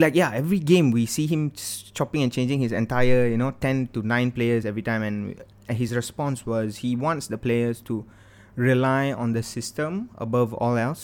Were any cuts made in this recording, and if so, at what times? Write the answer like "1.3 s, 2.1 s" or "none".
none